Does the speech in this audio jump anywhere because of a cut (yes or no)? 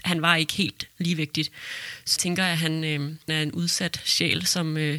yes